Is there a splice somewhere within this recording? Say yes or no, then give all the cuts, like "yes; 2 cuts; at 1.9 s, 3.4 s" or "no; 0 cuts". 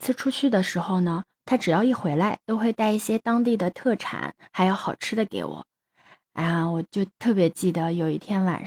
no; 0 cuts